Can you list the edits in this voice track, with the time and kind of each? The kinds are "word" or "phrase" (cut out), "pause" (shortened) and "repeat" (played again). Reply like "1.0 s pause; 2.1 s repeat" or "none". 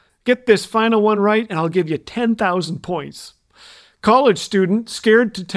none

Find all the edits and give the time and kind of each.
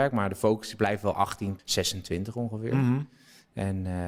1.6 s word

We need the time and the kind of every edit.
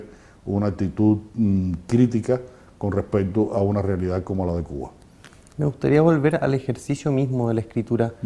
none

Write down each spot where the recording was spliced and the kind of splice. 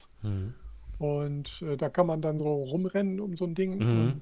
none

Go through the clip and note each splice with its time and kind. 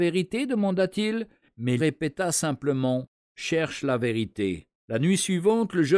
1.8 s word; 4.8 s pause

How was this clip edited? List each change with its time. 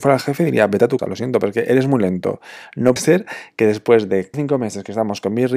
1.0 s word; 3.0 s word; 4.3 s word

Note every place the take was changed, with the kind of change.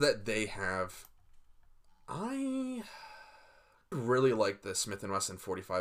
3.9 s phrase

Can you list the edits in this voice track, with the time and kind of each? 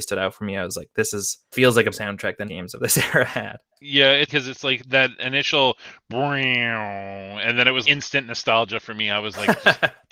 1.5 s word; 1.9 s word; 2.5 s word; 4.3 s word; 4.8 s word; 7.8 s word

